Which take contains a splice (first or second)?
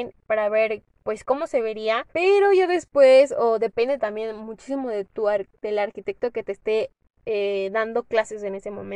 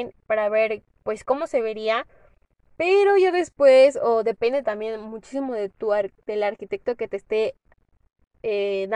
first